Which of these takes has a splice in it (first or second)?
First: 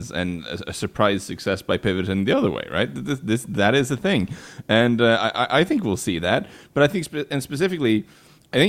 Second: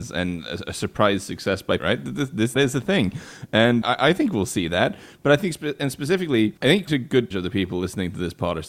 second